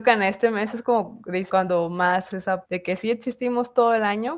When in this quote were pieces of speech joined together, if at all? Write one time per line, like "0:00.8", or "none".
0:01.5
0:02.3
0:02.6